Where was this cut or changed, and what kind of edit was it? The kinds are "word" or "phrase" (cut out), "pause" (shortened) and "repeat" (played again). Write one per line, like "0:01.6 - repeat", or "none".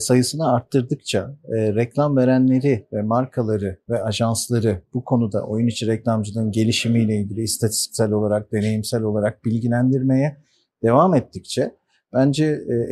none